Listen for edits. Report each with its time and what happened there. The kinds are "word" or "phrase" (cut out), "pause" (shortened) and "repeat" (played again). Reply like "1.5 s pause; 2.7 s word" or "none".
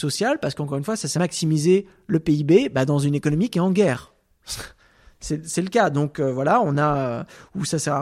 1.1 s phrase